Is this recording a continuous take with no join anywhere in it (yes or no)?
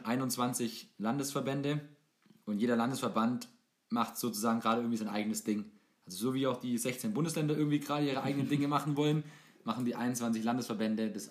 yes